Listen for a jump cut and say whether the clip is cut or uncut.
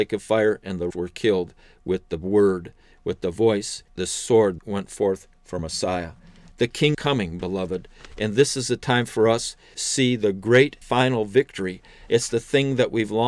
cut